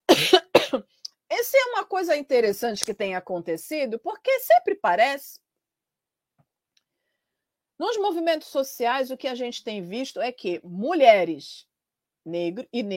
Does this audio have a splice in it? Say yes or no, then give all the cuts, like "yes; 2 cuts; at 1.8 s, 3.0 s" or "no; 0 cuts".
no; 0 cuts